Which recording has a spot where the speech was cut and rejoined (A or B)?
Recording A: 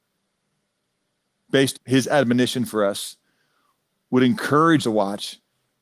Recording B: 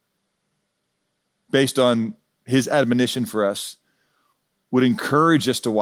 A